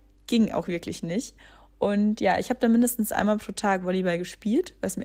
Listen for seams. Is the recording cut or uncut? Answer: uncut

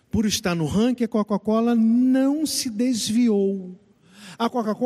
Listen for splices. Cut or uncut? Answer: cut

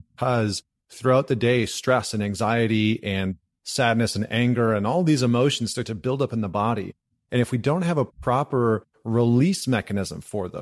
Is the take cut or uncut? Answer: uncut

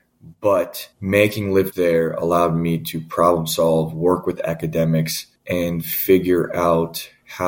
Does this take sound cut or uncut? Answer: cut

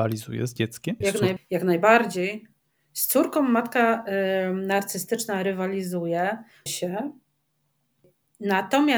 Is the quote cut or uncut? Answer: cut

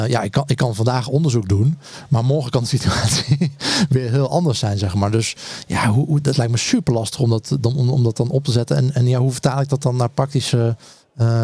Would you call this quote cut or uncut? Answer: uncut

